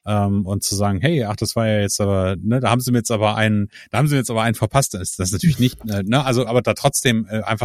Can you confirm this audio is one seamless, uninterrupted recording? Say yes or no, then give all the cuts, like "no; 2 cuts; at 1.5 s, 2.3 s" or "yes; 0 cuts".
no; 2 cuts; at 5.7 s, 6.5 s